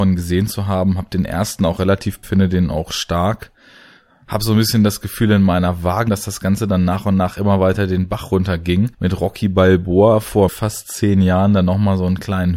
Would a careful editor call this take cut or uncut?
cut